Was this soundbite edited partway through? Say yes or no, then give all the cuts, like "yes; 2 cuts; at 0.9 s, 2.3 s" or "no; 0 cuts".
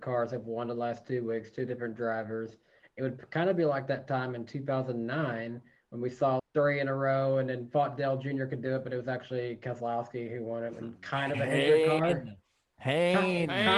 yes; 1 cut; at 6.4 s